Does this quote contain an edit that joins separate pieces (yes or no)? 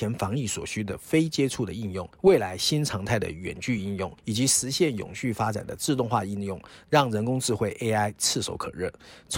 yes